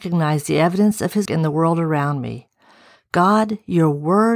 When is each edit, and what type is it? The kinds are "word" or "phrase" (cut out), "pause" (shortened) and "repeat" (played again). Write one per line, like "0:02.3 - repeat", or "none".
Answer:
0:01.3 - word